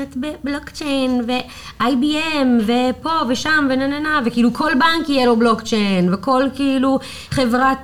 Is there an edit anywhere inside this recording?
no; 0 cuts

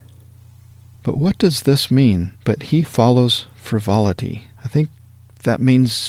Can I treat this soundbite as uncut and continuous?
no; 3 cuts; at 2.4 s, 2.8 s, 4.6 s

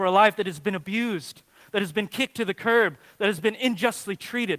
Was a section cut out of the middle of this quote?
no; 0 cuts

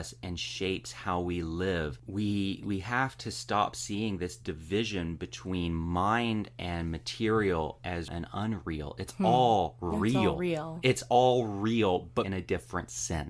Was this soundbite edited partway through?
yes; 2 cuts; at 8.1 s, 12.2 s

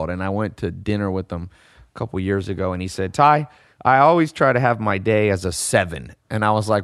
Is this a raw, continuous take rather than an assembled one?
yes; 0 cuts

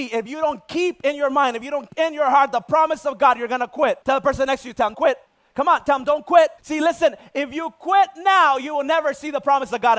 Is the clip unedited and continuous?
no; 5 cuts; at 1.9 s, 4.0 s, 4.9 s, 5.3 s, 6.6 s

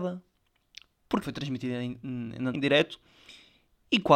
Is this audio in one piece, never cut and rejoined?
no; 2 cuts; at 1.2 s, 2.5 s

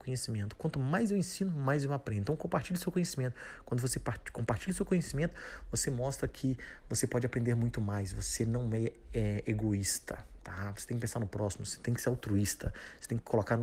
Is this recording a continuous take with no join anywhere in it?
yes; 0 cuts

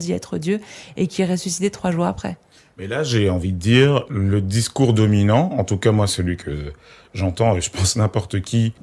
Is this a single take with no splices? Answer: yes; 0 cuts

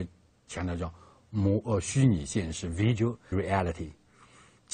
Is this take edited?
yes; 1 cut; at 3.3 s

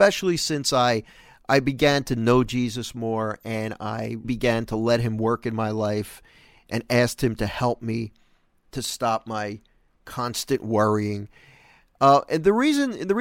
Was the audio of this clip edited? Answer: yes; 1 cut; at 4.2 s

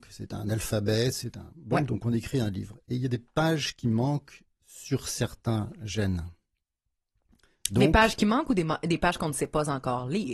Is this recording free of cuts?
yes; 0 cuts

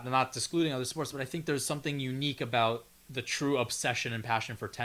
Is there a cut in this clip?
no; 0 cuts

